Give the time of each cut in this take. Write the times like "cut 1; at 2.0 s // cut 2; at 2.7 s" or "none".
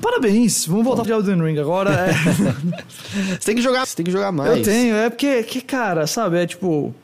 cut 1; at 1.0 s // cut 2; at 3.8 s